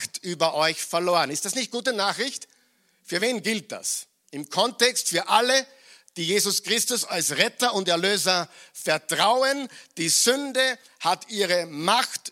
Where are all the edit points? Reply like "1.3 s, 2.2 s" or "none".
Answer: none

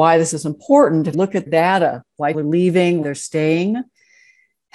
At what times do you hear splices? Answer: 1.1 s, 1.5 s, 2.3 s, 3.0 s

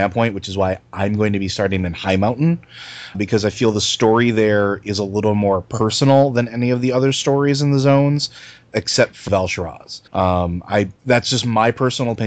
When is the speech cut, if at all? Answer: 3.1 s, 9.3 s, 10.1 s, 11.0 s

